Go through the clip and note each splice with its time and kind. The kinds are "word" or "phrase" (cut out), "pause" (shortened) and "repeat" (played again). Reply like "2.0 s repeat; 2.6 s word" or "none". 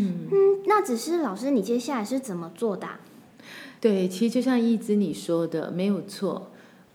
3.8 s pause

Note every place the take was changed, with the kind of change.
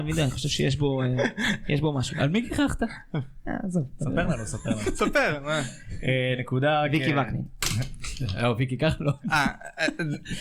none

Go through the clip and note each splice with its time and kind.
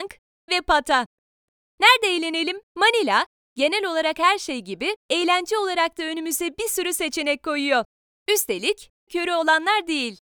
2.7 s pause; 5.0 s pause; 9.1 s word

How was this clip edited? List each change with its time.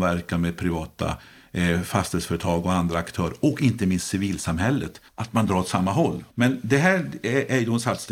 5.1 s pause; 6.3 s pause

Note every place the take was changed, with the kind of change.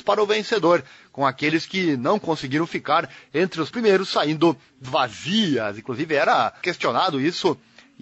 3.7 s word; 4.8 s word; 6.6 s word

